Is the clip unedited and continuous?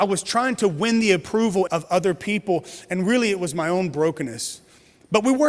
no; 1 cut; at 1.7 s

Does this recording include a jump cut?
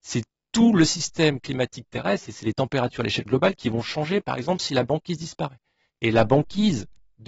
no; 0 cuts

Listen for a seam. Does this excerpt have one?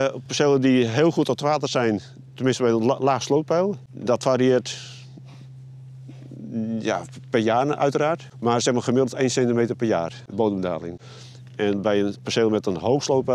no; 0 cuts

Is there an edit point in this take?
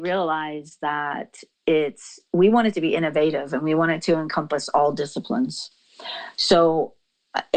no; 0 cuts

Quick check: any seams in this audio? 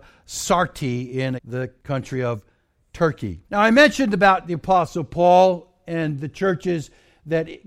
yes; 2 cuts; at 1.4 s, 3.4 s

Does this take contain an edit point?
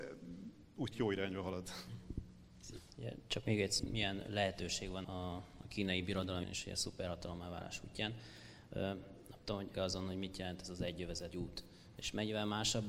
yes; 6 cuts; at 0.9 s, 3.8 s, 5.0 s, 6.4 s, 9.7 s, 11.3 s

